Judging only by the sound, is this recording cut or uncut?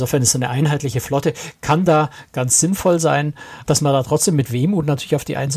cut